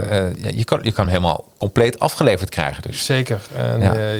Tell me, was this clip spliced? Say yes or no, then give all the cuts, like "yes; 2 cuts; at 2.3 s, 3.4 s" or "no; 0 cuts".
no; 0 cuts